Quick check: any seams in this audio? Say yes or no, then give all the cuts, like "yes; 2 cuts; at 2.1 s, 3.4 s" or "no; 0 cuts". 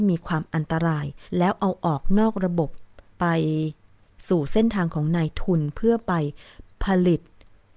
yes; 2 cuts; at 1.3 s, 3.1 s